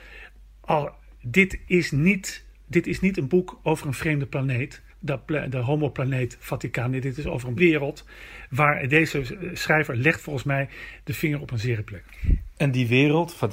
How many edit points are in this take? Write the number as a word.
two